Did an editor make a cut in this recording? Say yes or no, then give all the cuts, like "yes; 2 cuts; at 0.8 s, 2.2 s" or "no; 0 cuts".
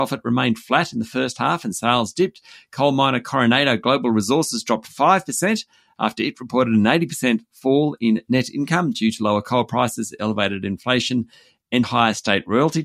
yes; 1 cut; at 11.8 s